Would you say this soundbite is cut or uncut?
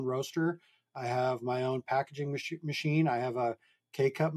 uncut